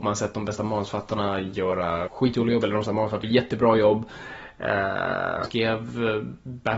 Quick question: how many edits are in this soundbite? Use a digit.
4